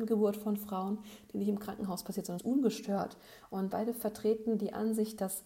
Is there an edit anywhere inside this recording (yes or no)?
yes